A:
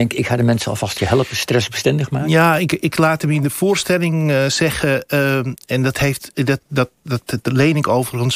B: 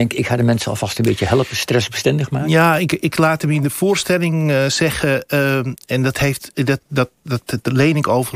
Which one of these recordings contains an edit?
A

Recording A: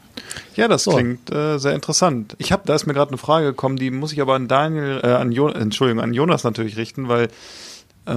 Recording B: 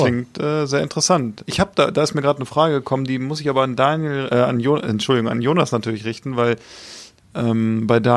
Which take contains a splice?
A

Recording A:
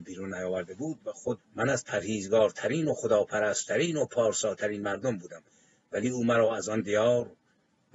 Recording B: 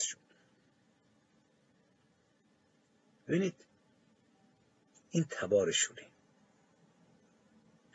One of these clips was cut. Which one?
A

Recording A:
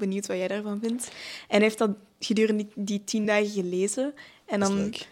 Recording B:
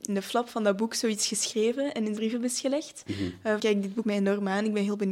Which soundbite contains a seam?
B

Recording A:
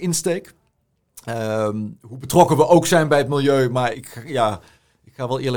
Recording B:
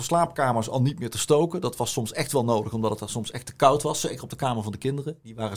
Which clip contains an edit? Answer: A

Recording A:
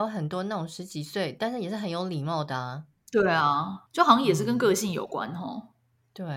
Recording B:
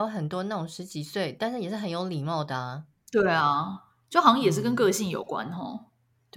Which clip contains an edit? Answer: A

